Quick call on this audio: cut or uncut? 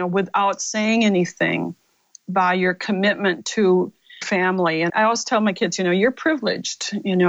cut